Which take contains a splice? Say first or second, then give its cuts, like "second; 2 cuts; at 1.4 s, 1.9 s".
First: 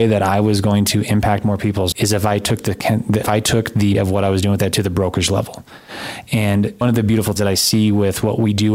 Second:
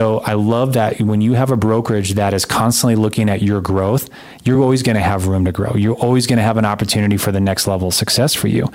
first; 6 cuts; at 1.9 s, 3.2 s, 3.9 s, 4.7 s, 6.8 s, 7.4 s